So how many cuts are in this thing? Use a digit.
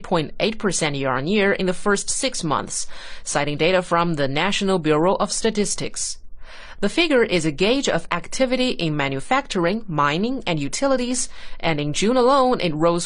0